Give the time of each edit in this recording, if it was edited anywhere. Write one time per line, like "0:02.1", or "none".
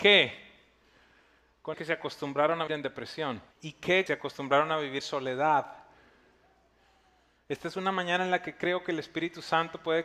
0:01.7
0:02.7
0:03.5
0:04.1
0:05.0